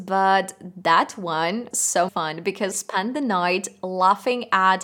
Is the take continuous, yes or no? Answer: no